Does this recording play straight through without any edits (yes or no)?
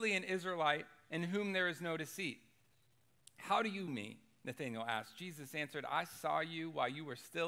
no